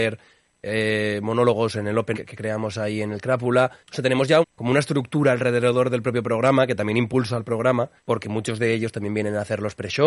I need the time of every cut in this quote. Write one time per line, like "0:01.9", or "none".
0:02.1
0:03.8
0:04.4
0:08.0